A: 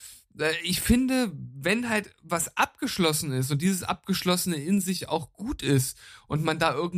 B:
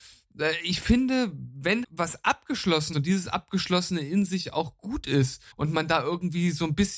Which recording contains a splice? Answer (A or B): B